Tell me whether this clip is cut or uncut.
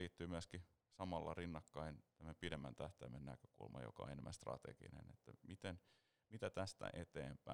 uncut